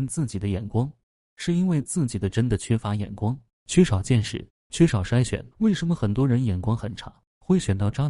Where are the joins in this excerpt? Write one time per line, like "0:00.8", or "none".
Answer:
0:05.5

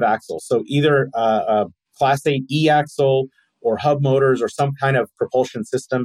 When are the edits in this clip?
none

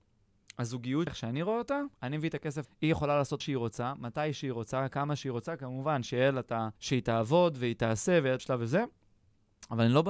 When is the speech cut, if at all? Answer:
0:01.1
0:01.9
0:02.6
0:03.4
0:06.8
0:08.4

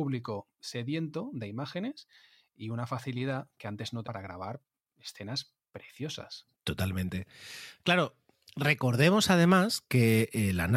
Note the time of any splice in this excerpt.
0:04.0
0:06.5

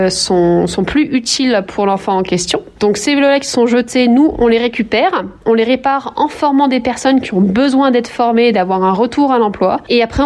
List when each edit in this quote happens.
none

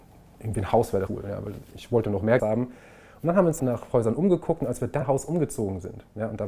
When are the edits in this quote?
0:01.1
0:02.4
0:03.6
0:05.0

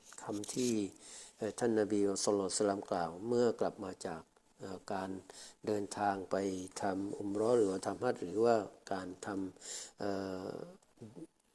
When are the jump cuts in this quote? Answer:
none

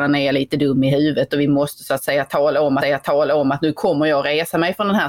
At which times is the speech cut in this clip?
0:02.8

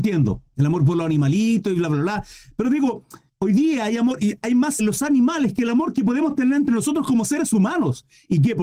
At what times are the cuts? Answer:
0:03.3
0:04.8

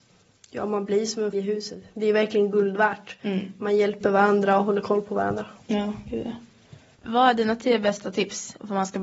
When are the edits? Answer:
0:01.3

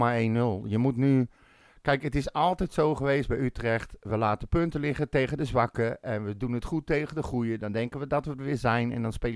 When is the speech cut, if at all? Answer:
none

